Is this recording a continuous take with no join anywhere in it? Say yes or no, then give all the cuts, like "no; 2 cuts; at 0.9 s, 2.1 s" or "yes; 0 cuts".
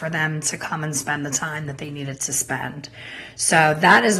yes; 0 cuts